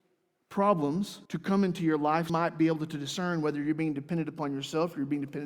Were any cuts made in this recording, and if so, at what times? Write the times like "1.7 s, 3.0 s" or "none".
1.3 s, 2.3 s